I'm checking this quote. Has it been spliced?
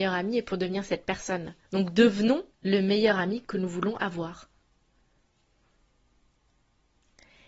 yes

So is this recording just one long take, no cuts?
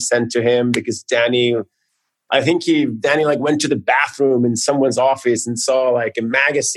yes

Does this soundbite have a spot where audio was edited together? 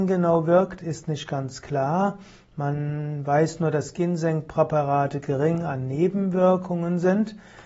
no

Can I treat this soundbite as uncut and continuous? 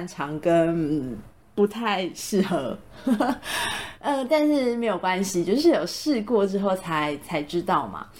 yes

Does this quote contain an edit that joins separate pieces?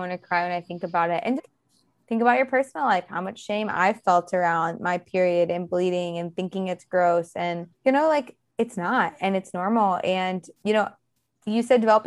yes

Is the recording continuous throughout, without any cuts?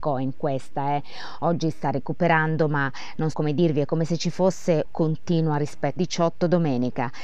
no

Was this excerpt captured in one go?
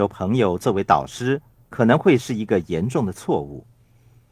yes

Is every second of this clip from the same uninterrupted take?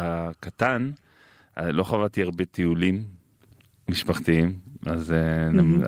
yes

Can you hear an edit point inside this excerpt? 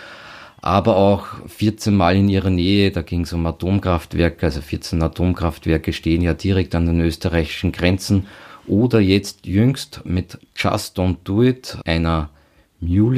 no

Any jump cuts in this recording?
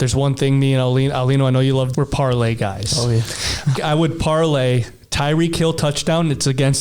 yes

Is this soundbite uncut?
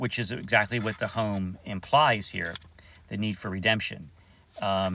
yes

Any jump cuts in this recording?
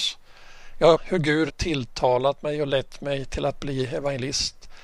yes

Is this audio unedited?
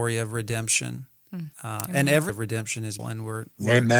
no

